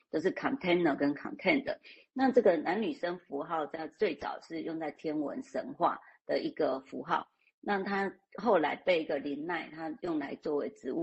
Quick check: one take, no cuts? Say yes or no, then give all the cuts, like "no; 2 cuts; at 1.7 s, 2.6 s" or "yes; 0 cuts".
yes; 0 cuts